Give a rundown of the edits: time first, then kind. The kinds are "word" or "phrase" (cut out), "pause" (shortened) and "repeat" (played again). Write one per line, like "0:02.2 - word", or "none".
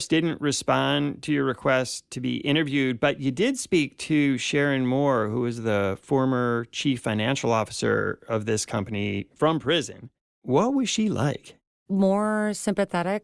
none